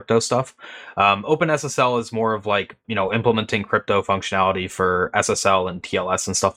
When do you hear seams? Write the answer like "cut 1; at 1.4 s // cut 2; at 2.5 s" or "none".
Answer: cut 1; at 2.8 s